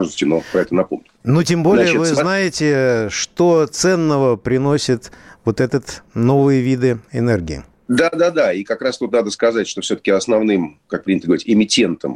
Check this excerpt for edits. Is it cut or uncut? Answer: uncut